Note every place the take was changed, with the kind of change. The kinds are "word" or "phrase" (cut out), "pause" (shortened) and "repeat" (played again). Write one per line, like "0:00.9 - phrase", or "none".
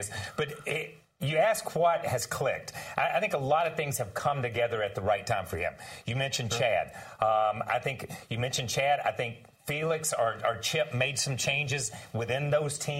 none